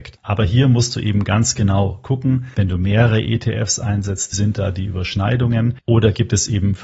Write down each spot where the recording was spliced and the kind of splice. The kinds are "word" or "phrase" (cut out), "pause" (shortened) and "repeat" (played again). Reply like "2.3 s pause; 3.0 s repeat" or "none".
4.3 s word